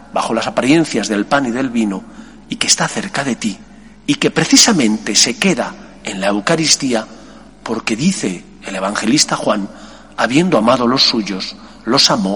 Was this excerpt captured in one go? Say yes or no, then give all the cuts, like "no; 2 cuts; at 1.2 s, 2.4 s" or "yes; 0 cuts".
yes; 0 cuts